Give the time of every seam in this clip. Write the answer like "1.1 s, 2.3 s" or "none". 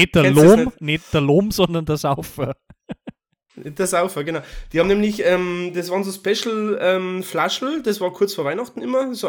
none